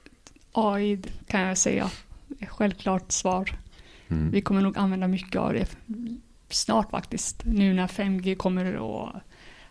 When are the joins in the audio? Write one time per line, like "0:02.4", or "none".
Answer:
none